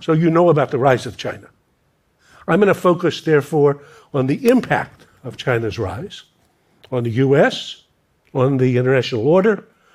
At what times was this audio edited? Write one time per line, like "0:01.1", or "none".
none